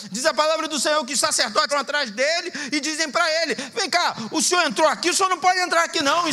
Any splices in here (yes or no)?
yes